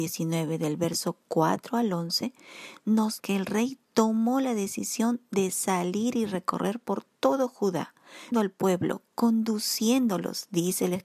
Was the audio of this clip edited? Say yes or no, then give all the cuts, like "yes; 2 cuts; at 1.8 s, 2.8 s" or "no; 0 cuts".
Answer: yes; 2 cuts; at 3.2 s, 8.3 s